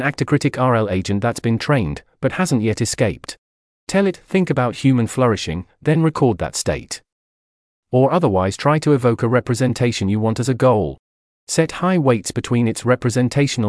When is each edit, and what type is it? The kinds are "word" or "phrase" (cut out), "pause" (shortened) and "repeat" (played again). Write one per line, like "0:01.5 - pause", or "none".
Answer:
none